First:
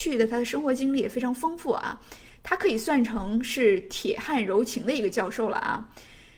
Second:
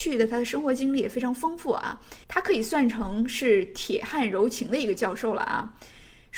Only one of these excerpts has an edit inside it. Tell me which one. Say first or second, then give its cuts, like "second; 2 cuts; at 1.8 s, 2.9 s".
second; 1 cut; at 2.2 s